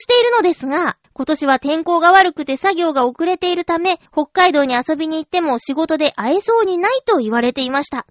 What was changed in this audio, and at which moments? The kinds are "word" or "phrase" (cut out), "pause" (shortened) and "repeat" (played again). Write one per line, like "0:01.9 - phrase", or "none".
0:01.0 - pause
0:04.1 - pause